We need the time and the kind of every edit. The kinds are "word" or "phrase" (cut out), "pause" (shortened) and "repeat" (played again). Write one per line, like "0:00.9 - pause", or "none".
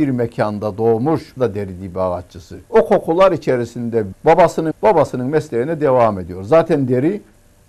0:01.4 - word
0:02.7 - pause
0:04.1 - word
0:04.7 - phrase